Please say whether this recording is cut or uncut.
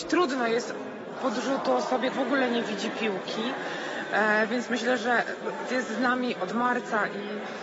cut